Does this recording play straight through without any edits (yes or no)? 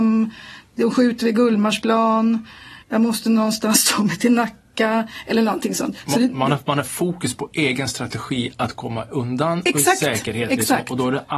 no